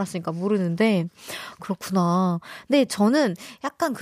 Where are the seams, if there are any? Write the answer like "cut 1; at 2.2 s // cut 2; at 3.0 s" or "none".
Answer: none